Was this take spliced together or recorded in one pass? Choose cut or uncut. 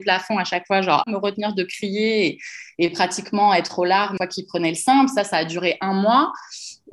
cut